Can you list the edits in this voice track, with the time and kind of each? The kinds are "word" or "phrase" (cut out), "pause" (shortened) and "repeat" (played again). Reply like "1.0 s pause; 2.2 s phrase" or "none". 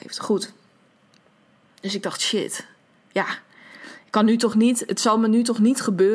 none